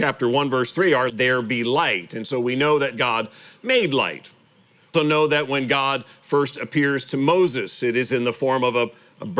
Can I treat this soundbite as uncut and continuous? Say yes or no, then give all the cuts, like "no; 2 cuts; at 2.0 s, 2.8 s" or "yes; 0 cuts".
no; 2 cuts; at 1.1 s, 4.9 s